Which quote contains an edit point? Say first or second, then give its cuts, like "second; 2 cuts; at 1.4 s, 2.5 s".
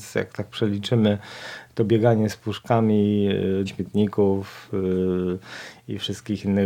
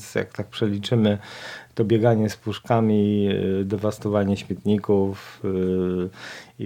first; 1 cut; at 3.7 s